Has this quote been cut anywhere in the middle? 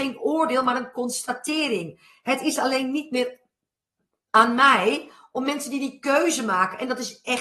no; 0 cuts

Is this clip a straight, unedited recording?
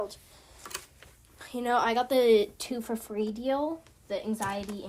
yes; 0 cuts

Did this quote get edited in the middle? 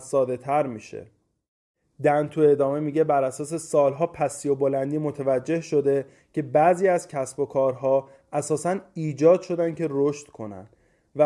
no; 0 cuts

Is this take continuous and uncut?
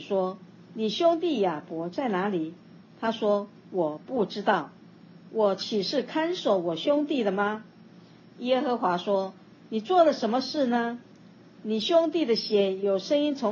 yes; 0 cuts

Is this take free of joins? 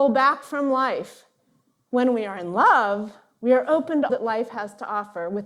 no; 1 cut; at 4.1 s

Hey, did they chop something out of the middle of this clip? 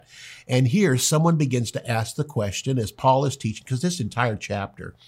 no; 0 cuts

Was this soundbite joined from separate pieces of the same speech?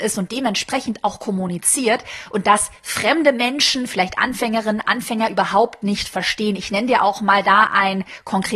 no; 0 cuts

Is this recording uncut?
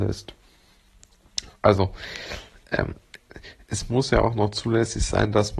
yes; 0 cuts

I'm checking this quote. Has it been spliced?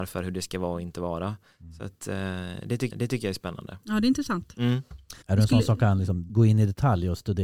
yes; 3 cuts; at 2.9 s, 5.2 s, 6.3 s

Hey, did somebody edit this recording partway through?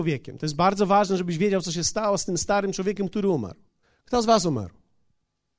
yes; 1 cut; at 3.8 s

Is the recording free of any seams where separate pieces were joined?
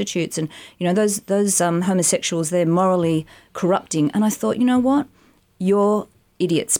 yes; 0 cuts

